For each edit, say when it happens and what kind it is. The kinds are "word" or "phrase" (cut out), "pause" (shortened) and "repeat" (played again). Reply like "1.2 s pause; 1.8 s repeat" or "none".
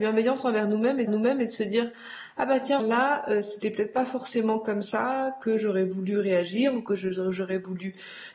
1.1 s repeat; 2.8 s word